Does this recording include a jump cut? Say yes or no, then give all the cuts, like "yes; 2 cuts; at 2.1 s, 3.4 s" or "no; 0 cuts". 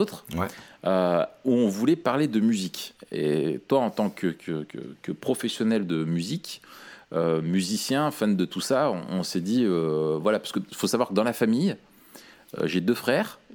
no; 0 cuts